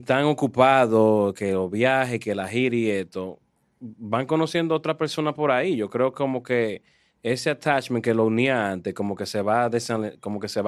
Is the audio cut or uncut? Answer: uncut